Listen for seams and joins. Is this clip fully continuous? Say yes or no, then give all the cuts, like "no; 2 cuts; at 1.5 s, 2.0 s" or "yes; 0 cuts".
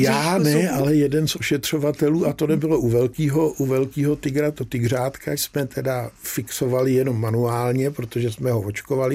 no; 2 cuts; at 4.6 s, 5.4 s